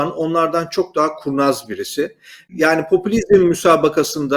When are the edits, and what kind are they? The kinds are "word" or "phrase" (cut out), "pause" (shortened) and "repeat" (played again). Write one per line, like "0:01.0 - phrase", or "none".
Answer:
none